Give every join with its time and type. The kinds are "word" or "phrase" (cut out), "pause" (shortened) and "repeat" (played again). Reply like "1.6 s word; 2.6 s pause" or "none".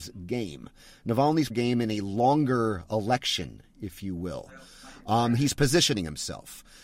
1.5 s phrase